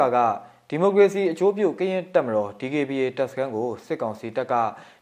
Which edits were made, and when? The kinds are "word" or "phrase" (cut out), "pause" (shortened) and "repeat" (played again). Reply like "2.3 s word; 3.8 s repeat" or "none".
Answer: none